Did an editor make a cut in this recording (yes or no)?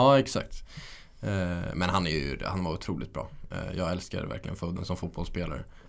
no